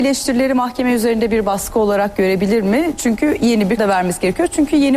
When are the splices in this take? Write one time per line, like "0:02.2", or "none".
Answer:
0:03.8